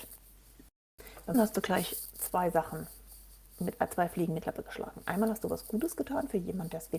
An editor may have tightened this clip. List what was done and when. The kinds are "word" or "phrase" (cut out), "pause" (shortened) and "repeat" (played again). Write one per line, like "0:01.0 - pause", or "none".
0:01.3 - word
0:04.4 - word

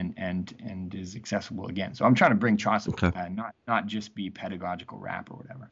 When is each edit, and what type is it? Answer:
0:02.9 - phrase

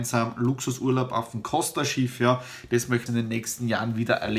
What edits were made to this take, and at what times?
0:03.1 - phrase

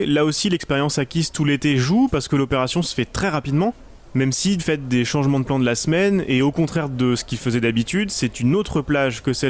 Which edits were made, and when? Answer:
0:04.6 - word

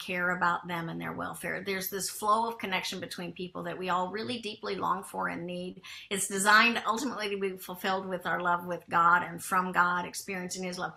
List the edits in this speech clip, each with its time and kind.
none

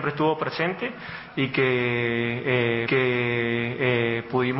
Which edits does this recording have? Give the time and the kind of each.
0:02.8 - repeat

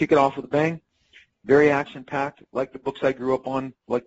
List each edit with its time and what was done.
none

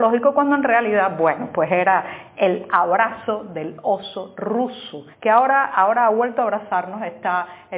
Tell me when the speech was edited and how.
0:05.1 - pause

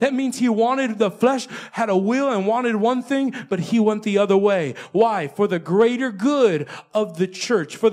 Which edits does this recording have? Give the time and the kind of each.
none

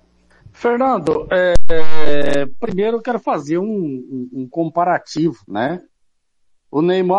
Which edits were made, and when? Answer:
0:05.4 - pause

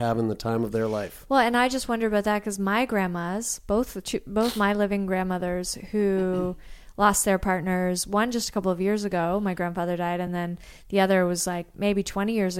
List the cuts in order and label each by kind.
none

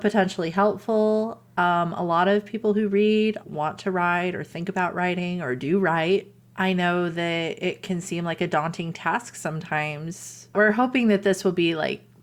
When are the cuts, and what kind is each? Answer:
0:03.4 - word

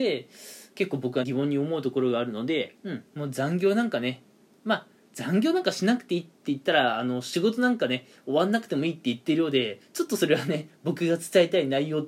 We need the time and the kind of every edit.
0:01.2 - word
0:03.1 - pause

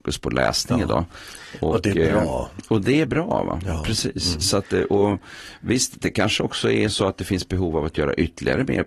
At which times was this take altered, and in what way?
none

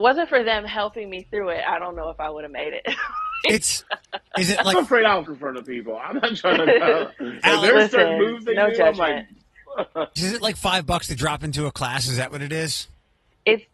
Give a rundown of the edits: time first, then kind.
0:04.7 - word
0:05.3 - word
0:10.2 - word

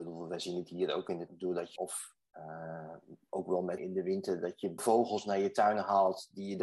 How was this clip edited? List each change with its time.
0:01.3 - word
0:01.8 - phrase
0:02.2 - pause
0:03.8 - word
0:04.8 - word

